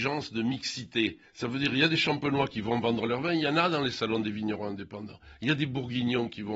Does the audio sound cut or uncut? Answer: cut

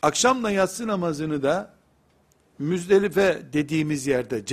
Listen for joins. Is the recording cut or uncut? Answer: cut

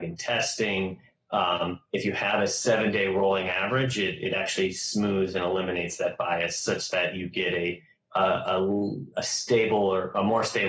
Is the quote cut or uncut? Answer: uncut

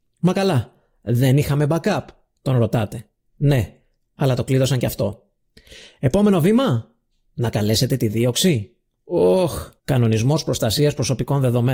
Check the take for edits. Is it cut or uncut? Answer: cut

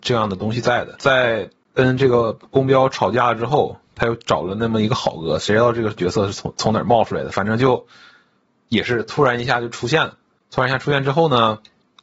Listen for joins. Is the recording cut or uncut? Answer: uncut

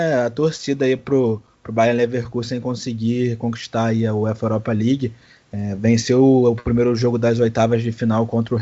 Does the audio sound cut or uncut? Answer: uncut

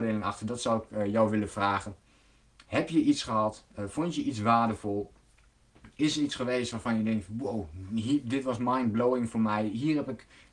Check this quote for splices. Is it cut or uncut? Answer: uncut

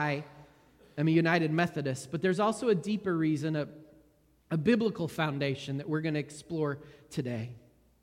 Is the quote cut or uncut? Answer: uncut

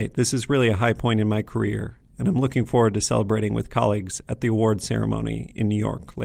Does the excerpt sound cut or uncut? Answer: uncut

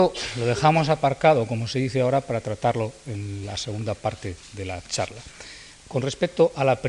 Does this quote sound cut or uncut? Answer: cut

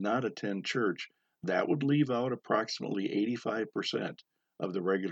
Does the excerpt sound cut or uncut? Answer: uncut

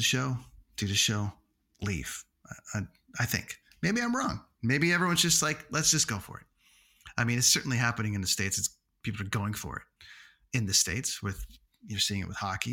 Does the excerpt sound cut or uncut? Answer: uncut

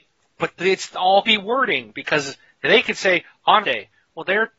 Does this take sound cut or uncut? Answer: cut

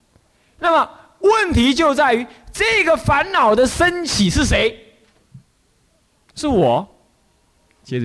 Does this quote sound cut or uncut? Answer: uncut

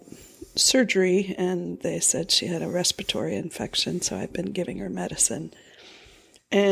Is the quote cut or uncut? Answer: uncut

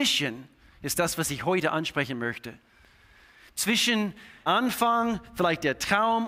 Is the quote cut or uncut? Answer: cut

